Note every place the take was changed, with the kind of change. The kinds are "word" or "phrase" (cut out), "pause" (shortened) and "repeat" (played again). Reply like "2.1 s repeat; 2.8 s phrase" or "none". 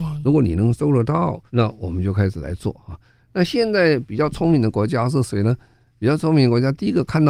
1.5 s pause